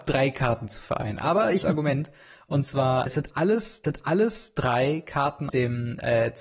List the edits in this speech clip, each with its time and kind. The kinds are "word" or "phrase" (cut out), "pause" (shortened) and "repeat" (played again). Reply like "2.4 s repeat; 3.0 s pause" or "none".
1.6 s phrase; 3.1 s word; 3.8 s repeat; 5.5 s word